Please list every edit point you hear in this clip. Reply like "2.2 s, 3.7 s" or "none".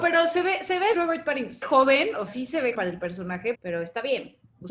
0.9 s, 1.6 s, 2.3 s, 2.7 s, 3.5 s